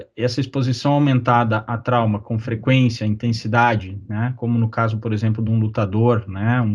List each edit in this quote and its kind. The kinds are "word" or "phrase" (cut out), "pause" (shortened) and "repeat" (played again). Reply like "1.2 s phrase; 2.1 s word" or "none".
none